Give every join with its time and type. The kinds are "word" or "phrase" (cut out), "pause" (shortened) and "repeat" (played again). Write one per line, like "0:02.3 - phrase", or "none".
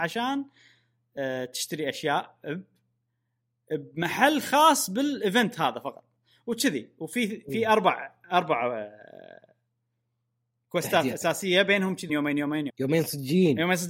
0:12.1 - word
0:12.7 - word